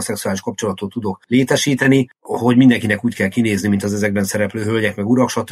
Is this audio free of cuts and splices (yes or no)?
yes